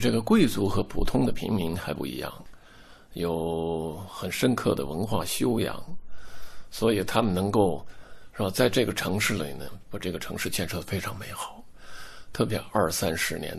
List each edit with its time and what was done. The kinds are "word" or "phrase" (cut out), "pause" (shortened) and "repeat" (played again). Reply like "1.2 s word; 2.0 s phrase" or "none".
none